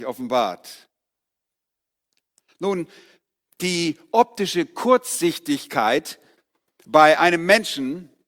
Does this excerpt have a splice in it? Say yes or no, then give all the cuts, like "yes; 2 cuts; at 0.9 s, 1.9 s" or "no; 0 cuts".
no; 0 cuts